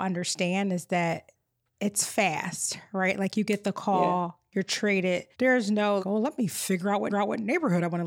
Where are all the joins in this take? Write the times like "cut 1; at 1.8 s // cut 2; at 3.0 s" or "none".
cut 1; at 5.3 s // cut 2; at 6.0 s // cut 3; at 7.1 s